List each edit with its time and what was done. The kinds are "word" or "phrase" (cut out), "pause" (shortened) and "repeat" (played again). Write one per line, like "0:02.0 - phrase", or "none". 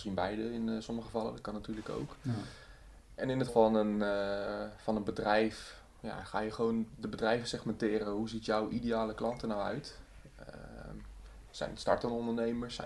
0:03.5 - word